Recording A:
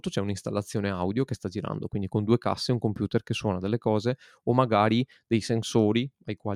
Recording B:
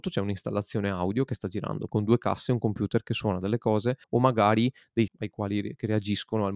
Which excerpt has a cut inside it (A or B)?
B